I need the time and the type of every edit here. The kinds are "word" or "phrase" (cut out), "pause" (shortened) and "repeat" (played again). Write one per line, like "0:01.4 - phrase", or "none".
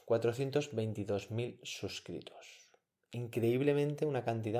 none